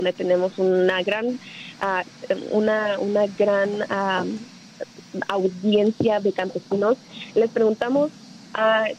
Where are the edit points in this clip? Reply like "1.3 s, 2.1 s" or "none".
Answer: none